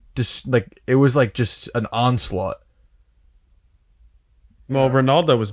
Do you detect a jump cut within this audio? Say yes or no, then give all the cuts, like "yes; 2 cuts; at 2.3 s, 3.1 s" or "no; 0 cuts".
no; 0 cuts